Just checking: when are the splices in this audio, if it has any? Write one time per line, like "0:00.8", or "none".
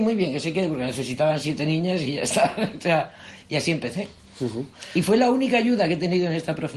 none